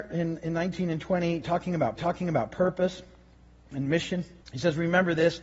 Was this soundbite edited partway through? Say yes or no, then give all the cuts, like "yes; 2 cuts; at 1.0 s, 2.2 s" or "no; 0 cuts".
yes; 2 cuts; at 2.0 s, 4.4 s